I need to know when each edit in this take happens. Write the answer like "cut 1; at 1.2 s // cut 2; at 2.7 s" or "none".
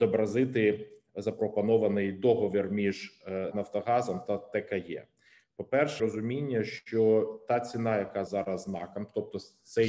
cut 1; at 3.5 s // cut 2; at 6.0 s // cut 3; at 8.3 s